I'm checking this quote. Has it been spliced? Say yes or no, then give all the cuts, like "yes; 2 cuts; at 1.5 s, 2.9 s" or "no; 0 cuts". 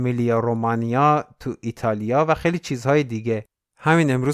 no; 0 cuts